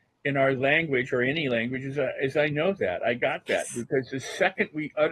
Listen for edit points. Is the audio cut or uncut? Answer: uncut